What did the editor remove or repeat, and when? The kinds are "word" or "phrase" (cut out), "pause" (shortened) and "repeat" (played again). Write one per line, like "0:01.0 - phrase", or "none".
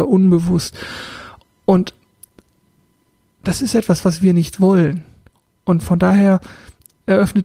none

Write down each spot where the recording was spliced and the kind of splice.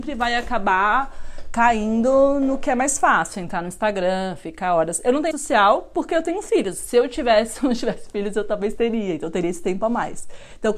0:05.3 - word

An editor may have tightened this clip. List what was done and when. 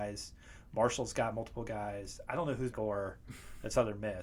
0:02.7 - phrase

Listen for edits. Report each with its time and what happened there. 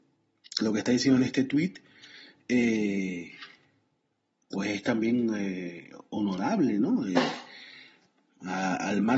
none

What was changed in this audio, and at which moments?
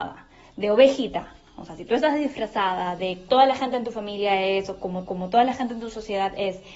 0:03.3 - word
0:05.1 - repeat

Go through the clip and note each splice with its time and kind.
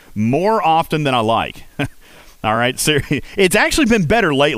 none

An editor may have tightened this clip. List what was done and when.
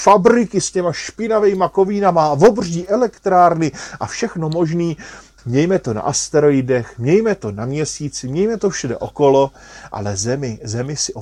0:05.3 - pause

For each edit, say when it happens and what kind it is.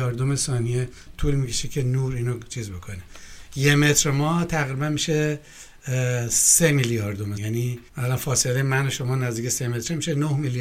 0:07.4 - word
0:07.9 - pause

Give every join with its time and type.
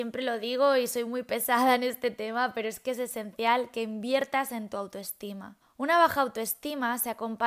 0:05.6 - pause

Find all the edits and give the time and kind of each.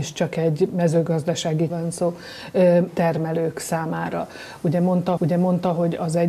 0:01.7 - word
0:02.9 - word
0:05.2 - repeat

